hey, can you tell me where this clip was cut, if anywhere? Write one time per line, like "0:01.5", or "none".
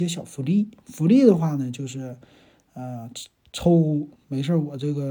none